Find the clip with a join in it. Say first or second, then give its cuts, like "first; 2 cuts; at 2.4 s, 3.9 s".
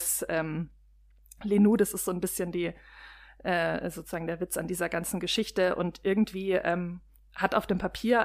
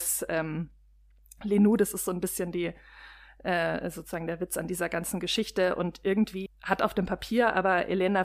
second; 1 cut; at 6.5 s